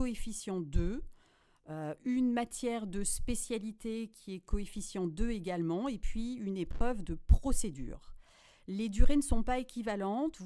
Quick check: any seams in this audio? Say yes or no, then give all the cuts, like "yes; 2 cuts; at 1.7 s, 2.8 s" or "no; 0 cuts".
no; 0 cuts